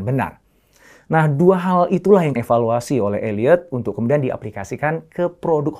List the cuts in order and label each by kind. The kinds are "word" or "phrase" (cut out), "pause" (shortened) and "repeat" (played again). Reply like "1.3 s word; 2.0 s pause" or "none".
2.4 s phrase